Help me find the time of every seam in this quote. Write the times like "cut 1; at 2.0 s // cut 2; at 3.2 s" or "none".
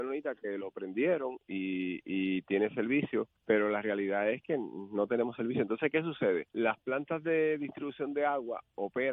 cut 1; at 3.4 s // cut 2; at 6.5 s